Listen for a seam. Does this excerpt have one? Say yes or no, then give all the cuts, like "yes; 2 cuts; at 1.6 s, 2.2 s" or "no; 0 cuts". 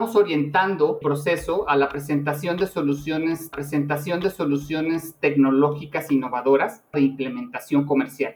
yes; 3 cuts; at 1.0 s, 3.5 s, 6.9 s